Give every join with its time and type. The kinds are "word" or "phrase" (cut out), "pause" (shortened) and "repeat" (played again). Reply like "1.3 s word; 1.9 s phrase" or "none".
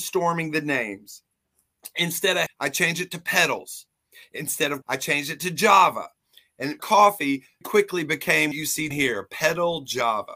2.5 s word; 4.8 s word; 6.8 s word; 7.6 s word; 8.5 s word; 8.9 s word